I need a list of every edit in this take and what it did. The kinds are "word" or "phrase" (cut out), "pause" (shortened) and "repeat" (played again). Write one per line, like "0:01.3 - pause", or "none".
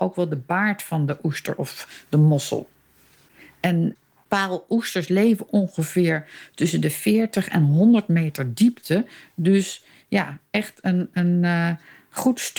none